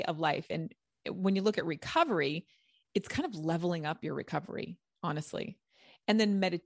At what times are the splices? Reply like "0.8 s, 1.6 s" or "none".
none